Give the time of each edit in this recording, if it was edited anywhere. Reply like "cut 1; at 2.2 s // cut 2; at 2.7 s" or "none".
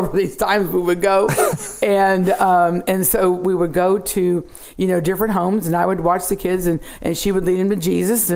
none